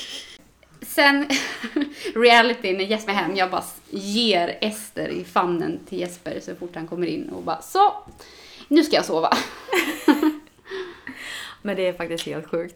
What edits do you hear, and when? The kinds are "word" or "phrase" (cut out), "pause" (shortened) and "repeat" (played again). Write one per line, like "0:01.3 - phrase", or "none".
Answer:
0:03.1 - word